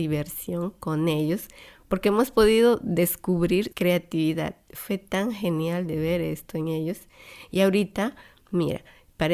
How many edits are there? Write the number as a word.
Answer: one